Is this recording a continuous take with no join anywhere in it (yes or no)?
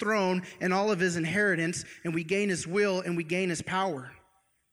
yes